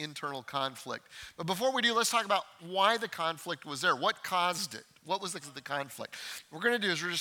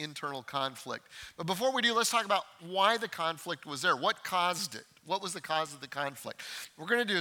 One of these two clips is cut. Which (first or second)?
first